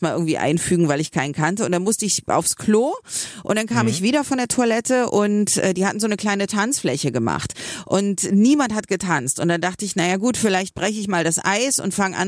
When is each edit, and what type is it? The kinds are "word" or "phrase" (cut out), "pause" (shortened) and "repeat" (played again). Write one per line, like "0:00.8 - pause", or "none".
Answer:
none